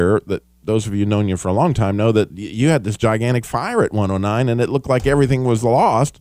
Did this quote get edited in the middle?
no; 0 cuts

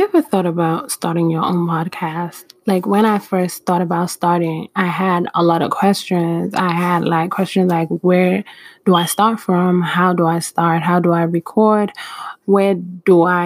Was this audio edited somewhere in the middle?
no; 0 cuts

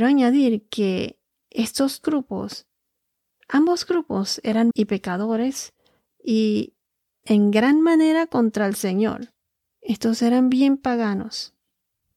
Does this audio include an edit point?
yes; 3 cuts; at 2.0 s, 4.7 s, 7.2 s

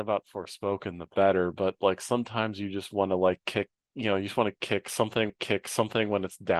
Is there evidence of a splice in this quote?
yes; 1 cut; at 5.3 s

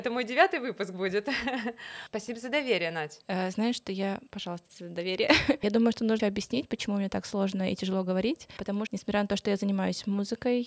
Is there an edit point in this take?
yes; 3 cuts; at 4.3 s, 6.2 s, 8.9 s

